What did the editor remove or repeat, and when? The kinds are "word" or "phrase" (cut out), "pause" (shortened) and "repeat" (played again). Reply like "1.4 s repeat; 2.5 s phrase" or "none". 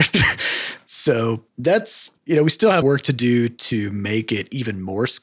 2.8 s phrase